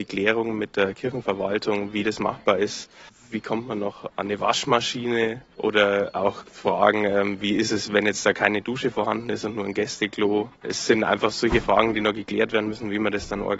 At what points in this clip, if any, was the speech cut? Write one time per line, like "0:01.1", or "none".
0:10.6